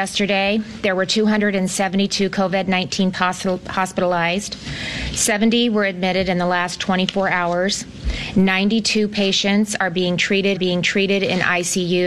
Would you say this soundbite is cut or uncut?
cut